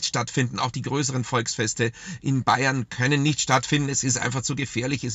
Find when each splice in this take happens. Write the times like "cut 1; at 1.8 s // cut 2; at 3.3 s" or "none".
none